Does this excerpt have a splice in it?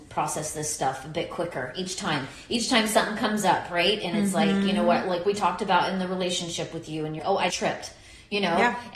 yes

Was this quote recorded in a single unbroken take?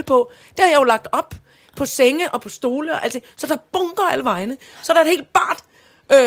yes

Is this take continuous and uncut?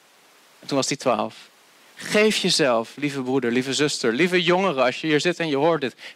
yes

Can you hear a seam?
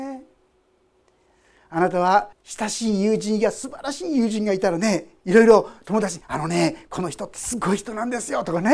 yes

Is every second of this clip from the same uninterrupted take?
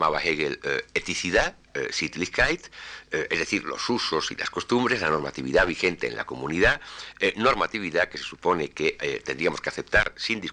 yes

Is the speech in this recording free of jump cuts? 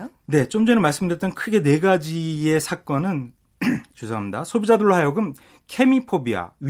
yes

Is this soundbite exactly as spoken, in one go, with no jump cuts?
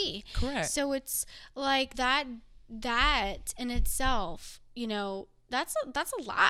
no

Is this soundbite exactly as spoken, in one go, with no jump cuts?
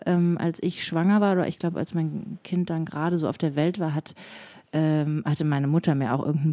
yes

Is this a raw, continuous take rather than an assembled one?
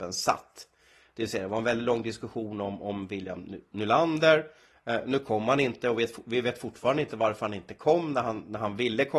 yes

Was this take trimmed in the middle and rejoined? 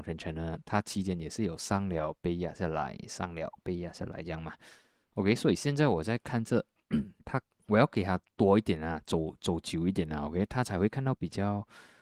yes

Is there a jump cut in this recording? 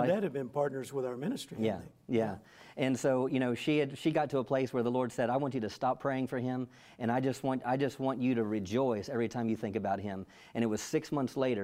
no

